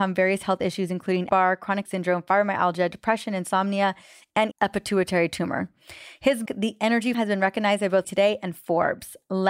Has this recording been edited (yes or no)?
yes